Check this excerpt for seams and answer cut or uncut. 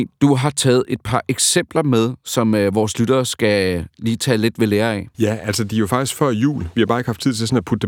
uncut